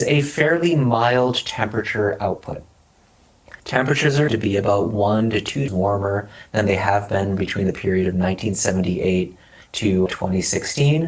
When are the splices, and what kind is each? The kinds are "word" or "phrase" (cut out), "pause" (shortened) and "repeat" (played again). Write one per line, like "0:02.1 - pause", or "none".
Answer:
0:03.6 - pause
0:04.3 - word
0:05.7 - word
0:10.1 - word